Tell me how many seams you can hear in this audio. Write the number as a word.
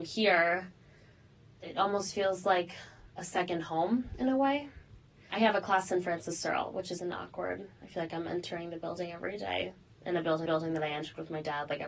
two